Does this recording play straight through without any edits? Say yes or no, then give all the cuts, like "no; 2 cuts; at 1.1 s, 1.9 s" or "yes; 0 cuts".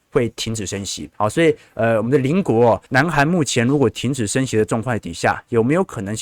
no; 2 cuts; at 1.1 s, 2.9 s